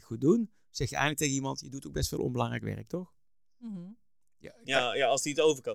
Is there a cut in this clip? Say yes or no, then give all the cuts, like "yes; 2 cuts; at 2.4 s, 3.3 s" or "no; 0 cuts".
no; 0 cuts